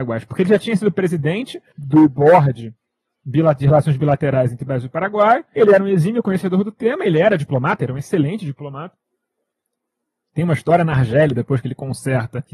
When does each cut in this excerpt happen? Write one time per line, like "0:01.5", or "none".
none